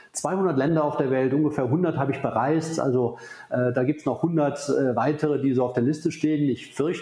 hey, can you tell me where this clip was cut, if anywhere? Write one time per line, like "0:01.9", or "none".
none